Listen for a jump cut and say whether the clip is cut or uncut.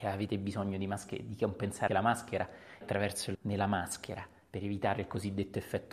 cut